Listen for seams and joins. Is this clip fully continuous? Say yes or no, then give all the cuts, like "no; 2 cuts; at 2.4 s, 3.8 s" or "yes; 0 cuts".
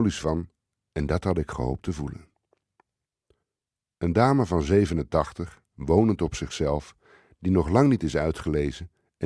yes; 0 cuts